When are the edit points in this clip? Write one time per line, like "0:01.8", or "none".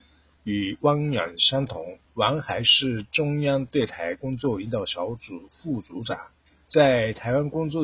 0:02.0
0:06.5